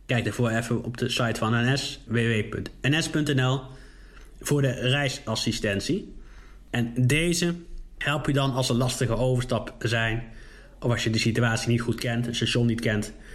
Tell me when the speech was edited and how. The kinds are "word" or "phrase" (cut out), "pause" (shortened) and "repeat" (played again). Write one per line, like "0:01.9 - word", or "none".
none